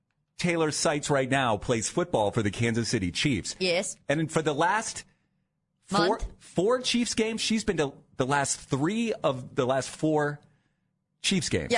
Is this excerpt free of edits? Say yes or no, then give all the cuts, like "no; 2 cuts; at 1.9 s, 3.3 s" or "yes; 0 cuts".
no; 1 cut; at 7.4 s